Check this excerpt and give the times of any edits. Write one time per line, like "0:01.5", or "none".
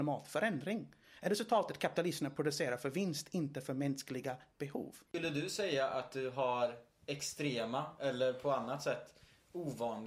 0:05.1